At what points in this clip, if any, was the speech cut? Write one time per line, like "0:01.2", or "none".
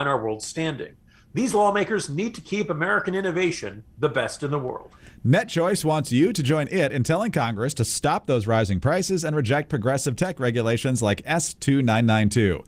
none